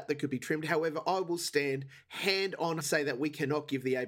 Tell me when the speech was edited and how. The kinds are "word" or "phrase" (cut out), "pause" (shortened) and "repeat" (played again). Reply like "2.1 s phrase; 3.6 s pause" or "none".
2.8 s phrase